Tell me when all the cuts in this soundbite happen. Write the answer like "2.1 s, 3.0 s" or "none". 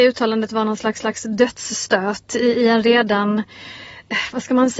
1.0 s